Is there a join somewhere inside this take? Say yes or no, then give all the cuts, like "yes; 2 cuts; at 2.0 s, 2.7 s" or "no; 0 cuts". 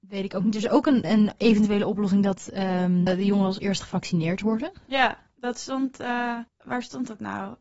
yes; 3 cuts; at 1.0 s, 3.1 s, 6.5 s